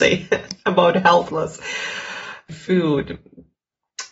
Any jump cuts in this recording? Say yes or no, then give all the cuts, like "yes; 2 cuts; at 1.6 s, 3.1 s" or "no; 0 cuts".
yes; 2 cuts; at 1.3 s, 2.5 s